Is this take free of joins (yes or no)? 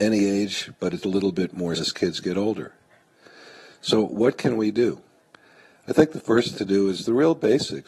no